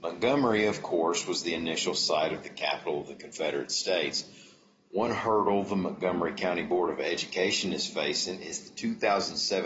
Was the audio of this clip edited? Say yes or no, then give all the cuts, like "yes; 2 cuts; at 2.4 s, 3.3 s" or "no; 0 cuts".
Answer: no; 0 cuts